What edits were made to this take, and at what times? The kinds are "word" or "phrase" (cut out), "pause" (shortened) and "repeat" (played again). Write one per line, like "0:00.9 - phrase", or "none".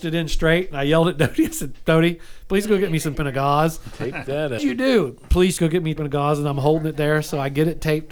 0:03.2 - word
0:04.6 - word
0:05.6 - word
0:06.0 - word